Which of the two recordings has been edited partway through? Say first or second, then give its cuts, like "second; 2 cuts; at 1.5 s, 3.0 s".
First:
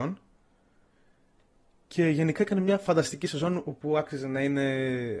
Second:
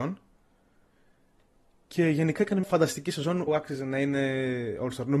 second; 2 cuts; at 2.6 s, 3.5 s